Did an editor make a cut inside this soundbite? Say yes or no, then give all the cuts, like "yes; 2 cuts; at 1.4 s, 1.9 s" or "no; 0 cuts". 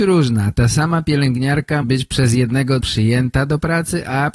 yes; 2 cuts; at 1.8 s, 2.8 s